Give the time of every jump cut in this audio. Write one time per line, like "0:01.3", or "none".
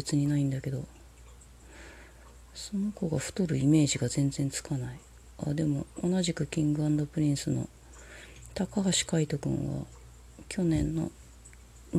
0:02.4